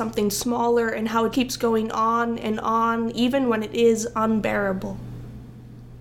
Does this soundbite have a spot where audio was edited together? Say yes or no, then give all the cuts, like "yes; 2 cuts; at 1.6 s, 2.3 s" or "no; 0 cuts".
yes; 1 cut; at 1.3 s